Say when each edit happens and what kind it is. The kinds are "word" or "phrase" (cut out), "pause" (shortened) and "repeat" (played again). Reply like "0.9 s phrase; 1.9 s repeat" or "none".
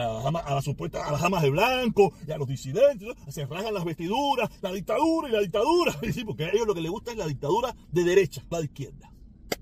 8.5 s word

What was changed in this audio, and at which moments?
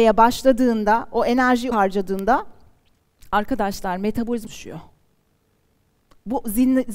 1.7 s word; 4.5 s word

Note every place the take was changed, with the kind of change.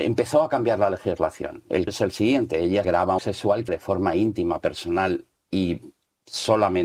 1.9 s word; 2.8 s word; 3.2 s phrase; 3.7 s word

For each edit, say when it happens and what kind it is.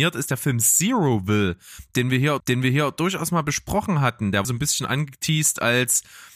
2.4 s repeat; 4.4 s phrase

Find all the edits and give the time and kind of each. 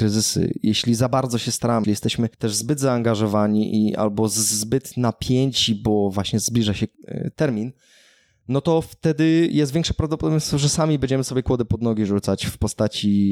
1.8 s word; 2.3 s pause

